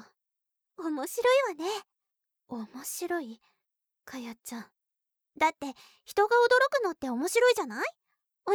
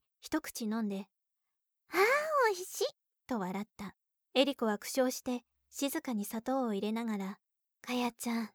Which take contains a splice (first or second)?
second